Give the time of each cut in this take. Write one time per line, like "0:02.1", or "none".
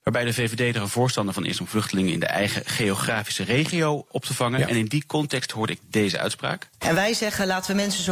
0:04.1